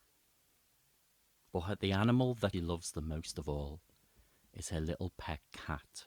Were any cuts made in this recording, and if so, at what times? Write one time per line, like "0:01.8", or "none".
0:02.5